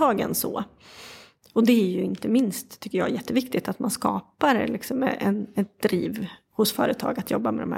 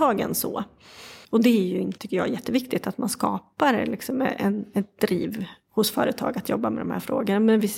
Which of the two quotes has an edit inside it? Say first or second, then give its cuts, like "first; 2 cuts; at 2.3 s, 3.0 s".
second; 2 cuts; at 1.2 s, 2.0 s